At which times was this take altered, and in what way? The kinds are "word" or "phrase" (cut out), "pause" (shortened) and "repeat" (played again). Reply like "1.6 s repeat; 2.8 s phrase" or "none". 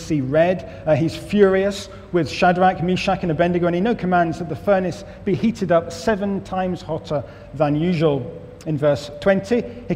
none